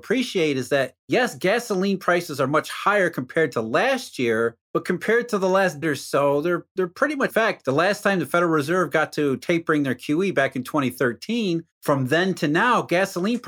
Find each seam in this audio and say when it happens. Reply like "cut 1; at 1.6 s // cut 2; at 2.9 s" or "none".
cut 1; at 5.8 s // cut 2; at 7.3 s